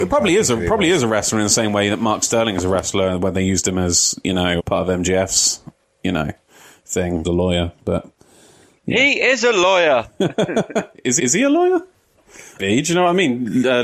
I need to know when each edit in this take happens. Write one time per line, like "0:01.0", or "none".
0:04.6
0:07.2
0:11.2
0:12.6